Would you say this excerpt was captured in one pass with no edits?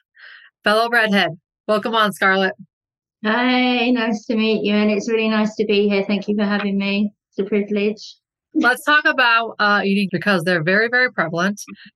no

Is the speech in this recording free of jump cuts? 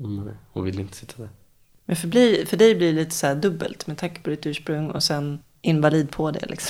yes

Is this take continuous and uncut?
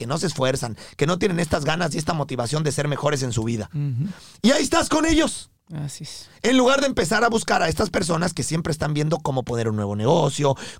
yes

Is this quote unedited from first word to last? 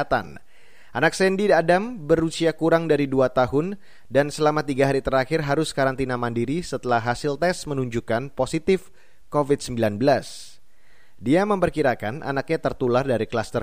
yes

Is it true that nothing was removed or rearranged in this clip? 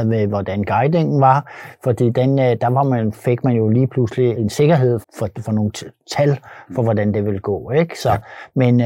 no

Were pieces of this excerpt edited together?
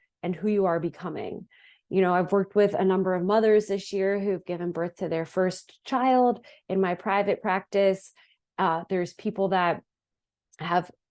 no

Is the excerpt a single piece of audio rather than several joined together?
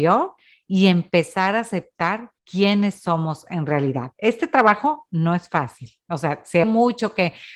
no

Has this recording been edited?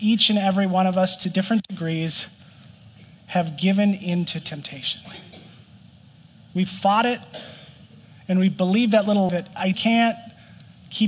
yes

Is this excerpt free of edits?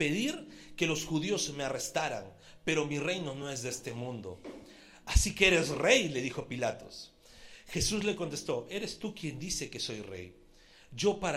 yes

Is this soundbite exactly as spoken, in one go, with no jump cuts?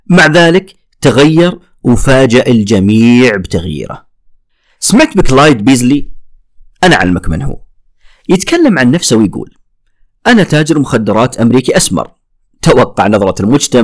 yes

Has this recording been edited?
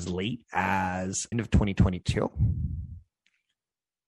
yes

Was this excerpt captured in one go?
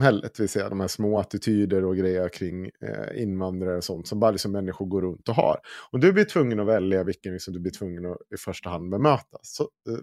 yes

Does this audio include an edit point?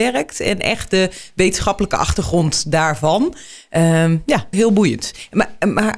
yes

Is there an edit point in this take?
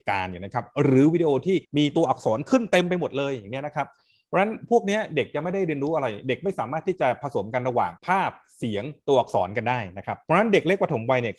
yes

